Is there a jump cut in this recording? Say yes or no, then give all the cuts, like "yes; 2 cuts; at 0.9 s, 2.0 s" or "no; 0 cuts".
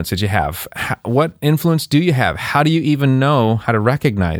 no; 0 cuts